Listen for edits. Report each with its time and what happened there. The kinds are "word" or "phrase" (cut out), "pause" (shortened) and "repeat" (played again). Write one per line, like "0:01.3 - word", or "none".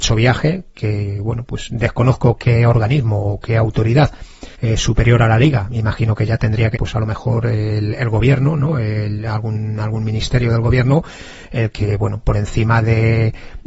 0:04.5 - pause
0:06.7 - word
0:12.2 - word